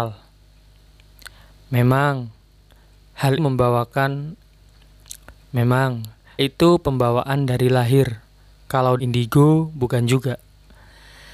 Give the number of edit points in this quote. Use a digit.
3